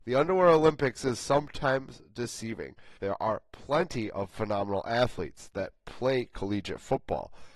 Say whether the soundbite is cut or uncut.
cut